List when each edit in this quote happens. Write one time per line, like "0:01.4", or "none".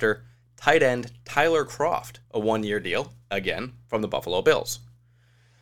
0:02.3